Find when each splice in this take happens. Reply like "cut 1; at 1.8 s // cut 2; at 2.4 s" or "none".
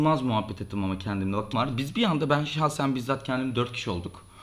cut 1; at 1.5 s